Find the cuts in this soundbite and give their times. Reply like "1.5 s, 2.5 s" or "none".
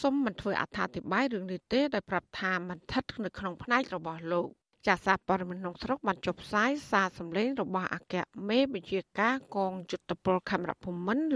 4.6 s